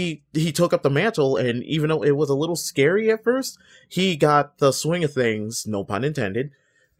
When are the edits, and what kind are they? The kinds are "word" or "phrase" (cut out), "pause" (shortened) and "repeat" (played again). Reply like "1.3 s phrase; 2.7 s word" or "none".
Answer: none